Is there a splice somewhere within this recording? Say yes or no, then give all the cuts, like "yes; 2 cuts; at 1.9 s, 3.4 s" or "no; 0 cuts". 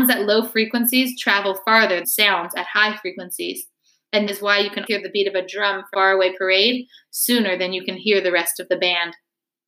yes; 4 cuts; at 2.0 s, 4.3 s, 4.9 s, 5.9 s